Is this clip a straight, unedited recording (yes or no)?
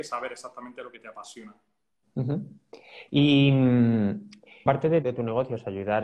no